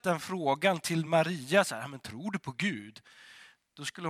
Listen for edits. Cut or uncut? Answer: uncut